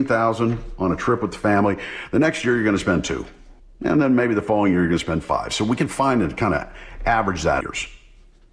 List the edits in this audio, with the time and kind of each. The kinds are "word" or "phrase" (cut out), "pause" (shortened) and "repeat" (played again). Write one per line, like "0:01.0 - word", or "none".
0:03.6 - pause
0:07.6 - phrase